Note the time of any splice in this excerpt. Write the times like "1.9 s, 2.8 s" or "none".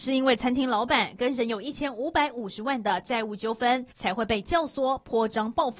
3.9 s